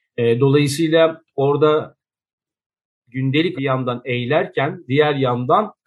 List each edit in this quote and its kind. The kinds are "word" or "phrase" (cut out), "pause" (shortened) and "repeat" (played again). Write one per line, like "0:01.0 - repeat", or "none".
0:03.6 - word